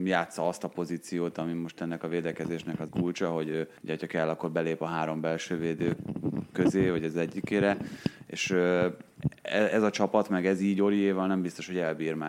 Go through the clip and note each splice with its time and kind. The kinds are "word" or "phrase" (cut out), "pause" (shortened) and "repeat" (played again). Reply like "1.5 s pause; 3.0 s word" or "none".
2.9 s word; 3.8 s pause